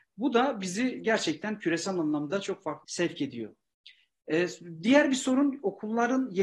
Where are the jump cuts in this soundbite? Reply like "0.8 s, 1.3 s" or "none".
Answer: 2.8 s